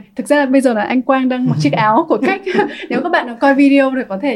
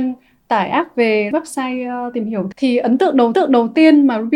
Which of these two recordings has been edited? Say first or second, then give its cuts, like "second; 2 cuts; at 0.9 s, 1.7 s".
second; 3 cuts; at 1.3 s, 2.5 s, 3.3 s